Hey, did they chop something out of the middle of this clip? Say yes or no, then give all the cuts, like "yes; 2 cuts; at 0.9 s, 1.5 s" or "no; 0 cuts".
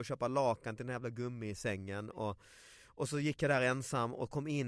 no; 0 cuts